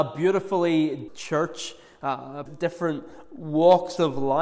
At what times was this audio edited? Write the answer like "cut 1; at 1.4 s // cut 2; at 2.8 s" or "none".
cut 1; at 1.1 s // cut 2; at 2.5 s